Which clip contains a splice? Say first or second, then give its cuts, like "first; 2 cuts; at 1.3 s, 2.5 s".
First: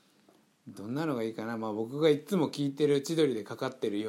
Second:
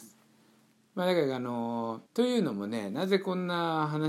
second; 1 cut; at 2.1 s